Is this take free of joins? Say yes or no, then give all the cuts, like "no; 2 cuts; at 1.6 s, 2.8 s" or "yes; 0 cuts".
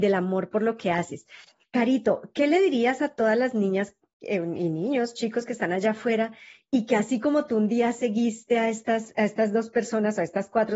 yes; 0 cuts